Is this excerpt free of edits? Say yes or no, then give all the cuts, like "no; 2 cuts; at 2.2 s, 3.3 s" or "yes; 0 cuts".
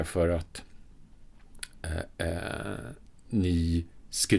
yes; 0 cuts